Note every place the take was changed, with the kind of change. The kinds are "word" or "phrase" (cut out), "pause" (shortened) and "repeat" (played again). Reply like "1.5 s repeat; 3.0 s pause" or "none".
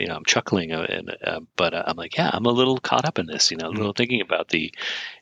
none